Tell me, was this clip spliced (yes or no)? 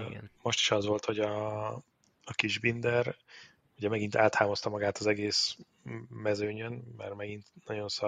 no